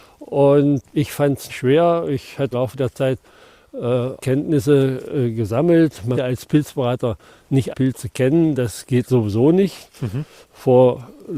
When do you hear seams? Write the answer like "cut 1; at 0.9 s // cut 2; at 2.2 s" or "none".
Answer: cut 1; at 1.5 s // cut 2; at 2.5 s // cut 3; at 4.2 s // cut 4; at 6.1 s // cut 5; at 7.7 s